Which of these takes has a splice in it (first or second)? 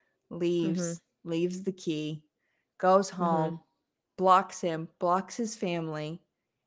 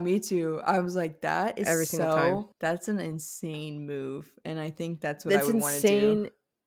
second